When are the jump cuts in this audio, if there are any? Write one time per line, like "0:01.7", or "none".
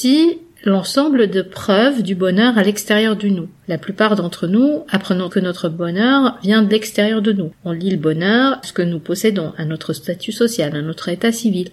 0:05.3
0:08.6